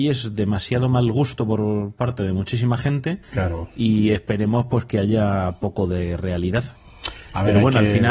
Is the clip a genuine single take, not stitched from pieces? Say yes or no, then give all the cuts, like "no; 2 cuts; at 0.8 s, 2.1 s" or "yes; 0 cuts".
no; 1 cut; at 3.2 s